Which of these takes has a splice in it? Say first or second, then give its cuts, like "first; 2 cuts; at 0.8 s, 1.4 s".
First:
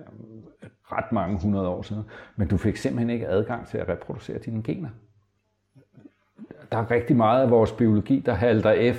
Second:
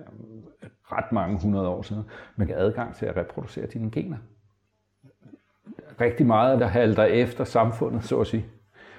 second; 3 cuts; at 2.5 s, 6.0 s, 6.6 s